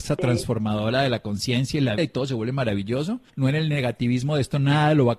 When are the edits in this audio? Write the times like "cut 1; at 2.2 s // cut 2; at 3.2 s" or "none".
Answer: cut 1; at 2.0 s // cut 2; at 3.3 s

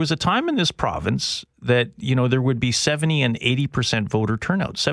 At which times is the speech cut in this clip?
none

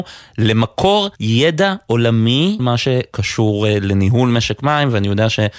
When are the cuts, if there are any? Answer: cut 1; at 1.2 s // cut 2; at 2.6 s

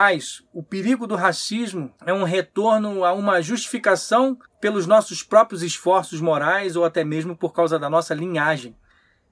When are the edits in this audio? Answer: cut 1; at 2.0 s // cut 2; at 4.5 s

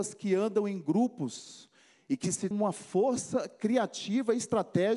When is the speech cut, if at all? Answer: cut 1; at 2.5 s

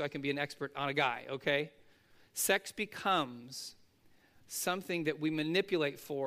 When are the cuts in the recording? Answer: none

